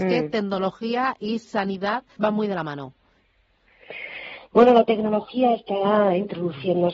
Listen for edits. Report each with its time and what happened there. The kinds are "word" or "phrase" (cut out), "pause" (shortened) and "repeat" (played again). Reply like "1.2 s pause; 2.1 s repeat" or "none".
2.2 s word